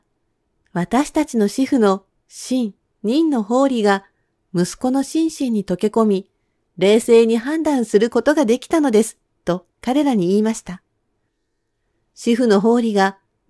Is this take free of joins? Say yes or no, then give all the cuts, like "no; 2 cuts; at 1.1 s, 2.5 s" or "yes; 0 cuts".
no; 2 cuts; at 2.9 s, 9.7 s